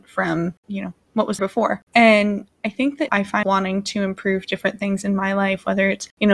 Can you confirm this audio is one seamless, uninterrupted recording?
no; 3 cuts; at 1.4 s, 3.1 s, 3.4 s

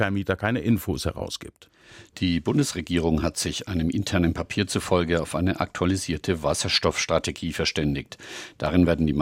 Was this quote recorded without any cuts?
yes; 0 cuts

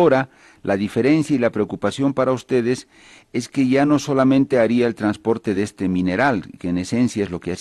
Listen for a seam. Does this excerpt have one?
no; 0 cuts

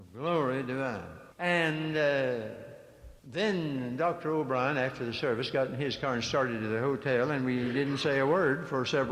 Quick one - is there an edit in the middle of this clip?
yes; 2 cuts; at 1.3 s, 3.2 s

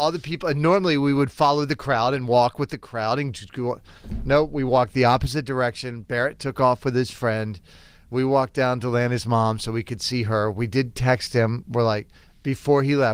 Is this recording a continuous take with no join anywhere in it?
yes; 0 cuts

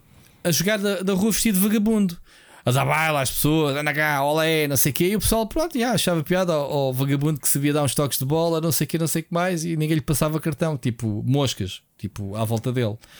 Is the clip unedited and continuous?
yes; 0 cuts

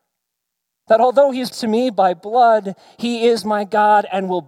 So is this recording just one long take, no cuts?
no; 1 cut; at 1.5 s

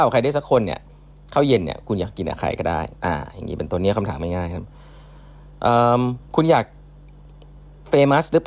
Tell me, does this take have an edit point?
yes; 2 cuts; at 3.0 s, 6.2 s

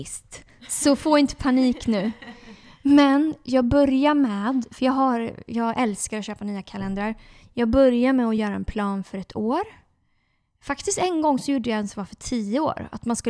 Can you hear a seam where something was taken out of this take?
no; 0 cuts

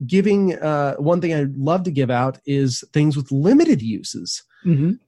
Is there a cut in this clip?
no; 0 cuts

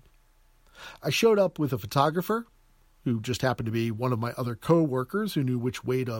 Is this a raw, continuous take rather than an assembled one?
yes; 0 cuts

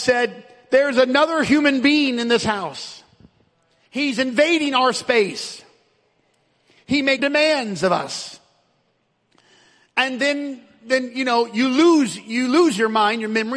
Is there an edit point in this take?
yes; 1 cut; at 7.2 s

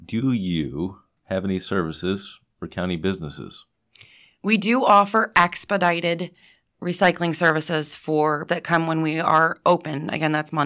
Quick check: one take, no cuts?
no; 1 cut; at 8.5 s

